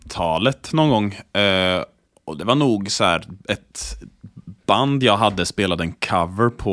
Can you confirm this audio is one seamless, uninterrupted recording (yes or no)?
yes